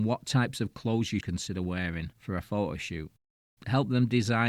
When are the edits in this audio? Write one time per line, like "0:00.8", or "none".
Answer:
0:01.2
0:02.4